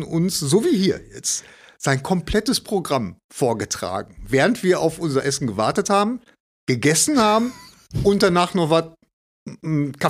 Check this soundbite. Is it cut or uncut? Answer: uncut